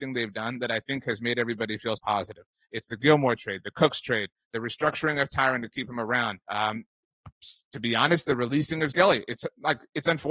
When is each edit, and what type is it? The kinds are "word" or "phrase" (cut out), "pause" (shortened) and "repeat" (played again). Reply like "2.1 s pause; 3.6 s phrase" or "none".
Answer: 2.0 s word; 6.4 s pause; 8.9 s word

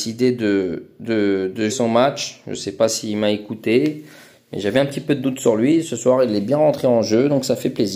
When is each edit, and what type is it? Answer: 1.7 s word

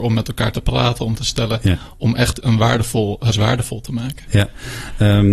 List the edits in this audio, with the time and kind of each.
1.2 s word; 2.4 s word; 3.3 s word

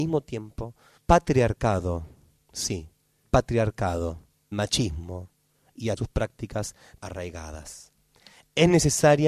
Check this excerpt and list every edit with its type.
1.0 s word; 3.2 s word; 4.5 s word; 6.0 s word; 7.0 s word

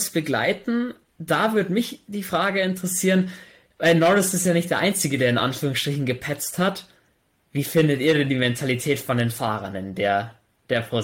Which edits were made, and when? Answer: none

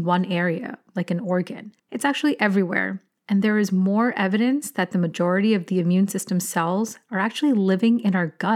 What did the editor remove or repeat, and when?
1.8 s pause

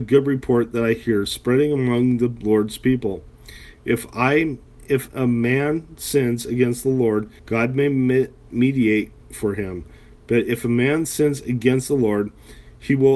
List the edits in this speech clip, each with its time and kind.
7.4 s pause

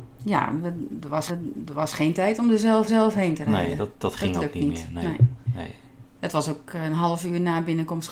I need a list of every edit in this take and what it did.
1.3 s repeat; 2.9 s repeat

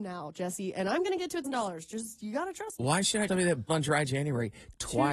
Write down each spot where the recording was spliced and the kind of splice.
1.4 s word; 3.3 s word; 3.7 s word

